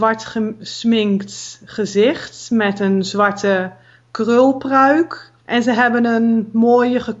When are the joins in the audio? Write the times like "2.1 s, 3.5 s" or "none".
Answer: 5.4 s